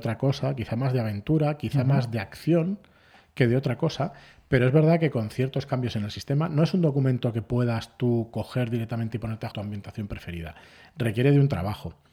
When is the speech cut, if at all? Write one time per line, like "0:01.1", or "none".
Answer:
0:09.5